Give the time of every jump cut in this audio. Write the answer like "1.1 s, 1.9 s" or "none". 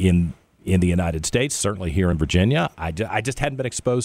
none